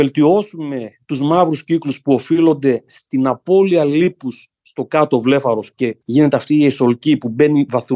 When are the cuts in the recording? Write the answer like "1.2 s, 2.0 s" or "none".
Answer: 6.0 s